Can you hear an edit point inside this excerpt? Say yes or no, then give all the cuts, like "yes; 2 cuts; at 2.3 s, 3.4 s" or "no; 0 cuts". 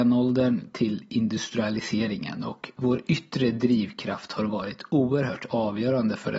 no; 0 cuts